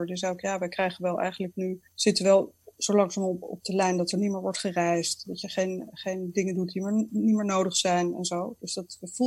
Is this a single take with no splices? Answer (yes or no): no